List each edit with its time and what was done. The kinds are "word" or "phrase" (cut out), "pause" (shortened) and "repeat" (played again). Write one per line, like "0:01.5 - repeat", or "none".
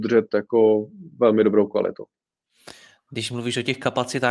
none